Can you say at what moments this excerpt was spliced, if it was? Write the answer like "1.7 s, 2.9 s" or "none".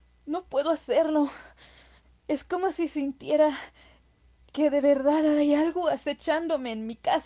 none

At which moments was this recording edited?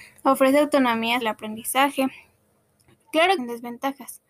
1.2 s, 3.4 s

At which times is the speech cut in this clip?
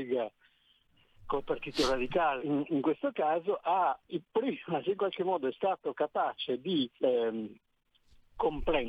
2.4 s, 4.1 s, 4.8 s, 6.9 s

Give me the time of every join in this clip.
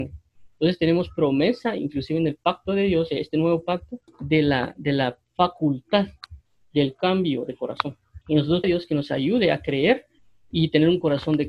4.1 s, 8.2 s, 8.6 s

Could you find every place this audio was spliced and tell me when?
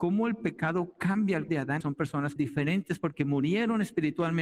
1.5 s, 1.8 s, 2.4 s

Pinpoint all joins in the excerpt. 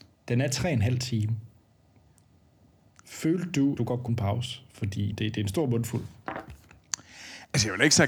3.8 s, 4.1 s, 5.1 s

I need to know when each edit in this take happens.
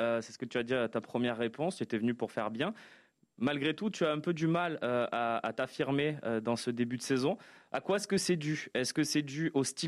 none

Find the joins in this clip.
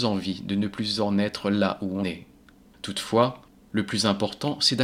2.0 s

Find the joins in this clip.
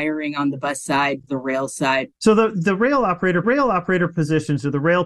1.3 s, 2.1 s, 3.4 s

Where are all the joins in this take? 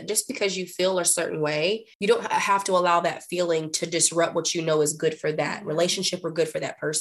1.9 s

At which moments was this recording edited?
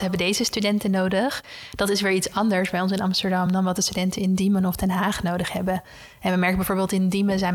none

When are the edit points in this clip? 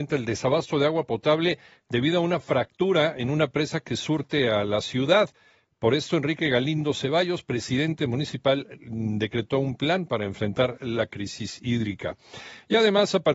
none

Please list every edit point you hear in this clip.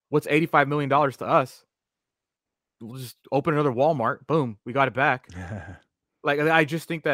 3.2 s

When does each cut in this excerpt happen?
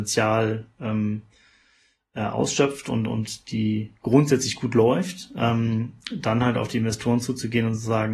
none

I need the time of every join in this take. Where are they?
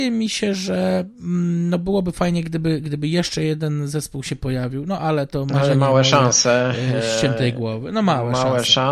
none

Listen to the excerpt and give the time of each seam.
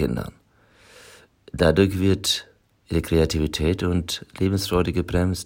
none

